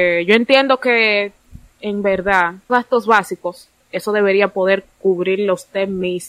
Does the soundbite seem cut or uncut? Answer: cut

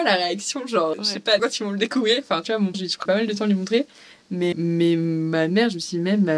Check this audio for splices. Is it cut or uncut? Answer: cut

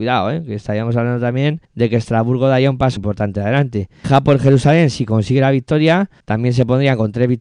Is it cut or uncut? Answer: cut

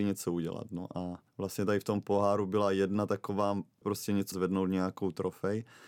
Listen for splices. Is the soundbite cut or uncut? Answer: cut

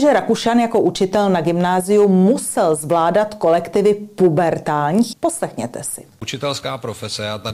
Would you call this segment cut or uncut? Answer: cut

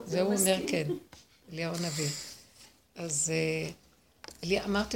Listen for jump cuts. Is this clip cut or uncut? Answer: uncut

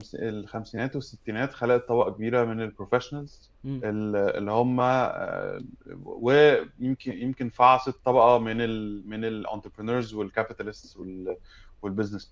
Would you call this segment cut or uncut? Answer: cut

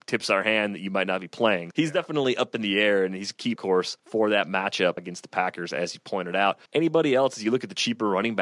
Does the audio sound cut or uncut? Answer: cut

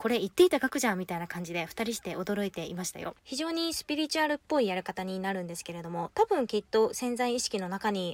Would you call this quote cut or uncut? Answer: cut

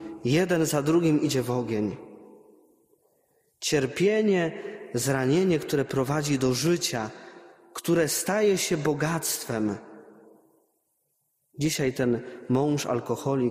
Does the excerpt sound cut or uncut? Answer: uncut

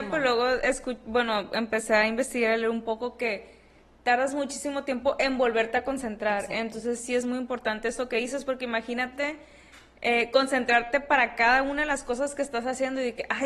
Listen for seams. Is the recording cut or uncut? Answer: uncut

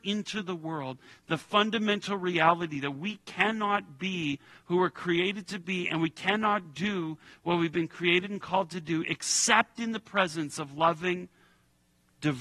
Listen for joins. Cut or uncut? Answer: uncut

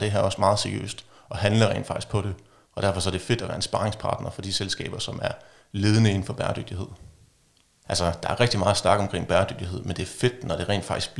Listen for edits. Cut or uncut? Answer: uncut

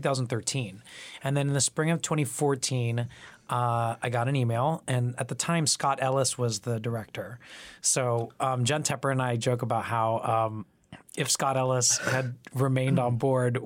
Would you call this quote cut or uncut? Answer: uncut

